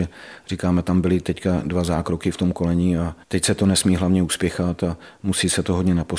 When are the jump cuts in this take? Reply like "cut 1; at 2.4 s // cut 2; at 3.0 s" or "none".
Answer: cut 1; at 3.2 s

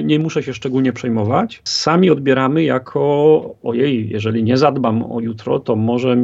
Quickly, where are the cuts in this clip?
none

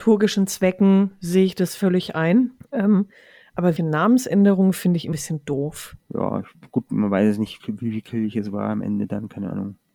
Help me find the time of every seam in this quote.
cut 1; at 3.8 s // cut 2; at 5.1 s // cut 3; at 7.6 s

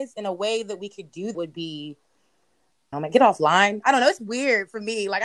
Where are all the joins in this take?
cut 1; at 1.3 s // cut 2; at 2.9 s

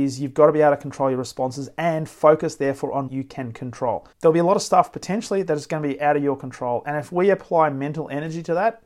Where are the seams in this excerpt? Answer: cut 1; at 3.1 s // cut 2; at 4.1 s

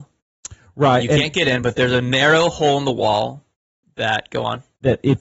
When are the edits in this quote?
none

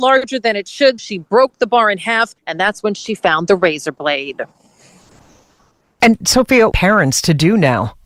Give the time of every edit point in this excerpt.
cut 1; at 1.0 s // cut 2; at 2.4 s // cut 3; at 6.7 s

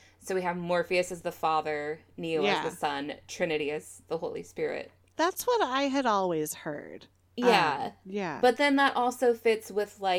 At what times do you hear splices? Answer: none

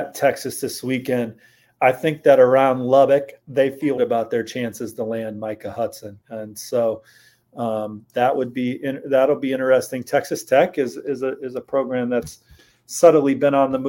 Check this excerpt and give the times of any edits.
cut 1; at 4.0 s // cut 2; at 6.2 s

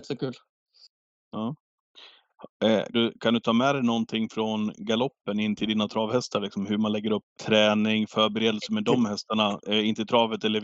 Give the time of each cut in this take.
cut 1; at 2.9 s // cut 2; at 7.3 s

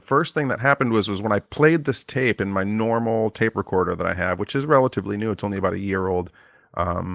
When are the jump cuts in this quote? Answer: cut 1; at 1.4 s

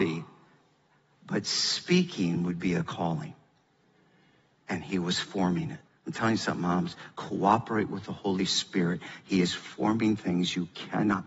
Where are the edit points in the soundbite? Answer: cut 1; at 5.9 s

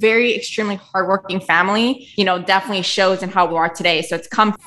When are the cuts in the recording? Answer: cut 1; at 2.1 s // cut 2; at 3.5 s

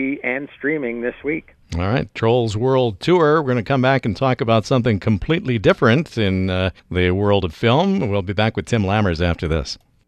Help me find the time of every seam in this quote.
cut 1; at 6.8 s

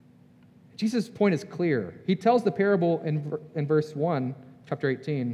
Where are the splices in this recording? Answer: none

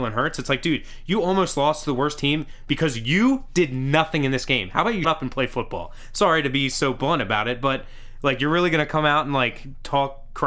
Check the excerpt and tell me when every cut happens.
cut 1; at 5.0 s

